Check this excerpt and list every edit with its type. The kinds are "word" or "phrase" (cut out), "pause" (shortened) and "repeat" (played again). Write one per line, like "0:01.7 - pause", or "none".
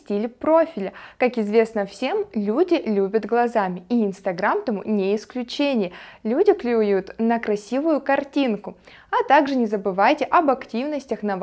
none